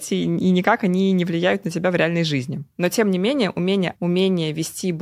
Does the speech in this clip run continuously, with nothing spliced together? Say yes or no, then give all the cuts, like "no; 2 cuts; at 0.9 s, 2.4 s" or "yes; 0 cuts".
no; 1 cut; at 3.9 s